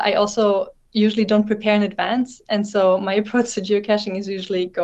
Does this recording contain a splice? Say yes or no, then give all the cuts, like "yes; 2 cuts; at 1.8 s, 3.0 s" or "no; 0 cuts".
no; 0 cuts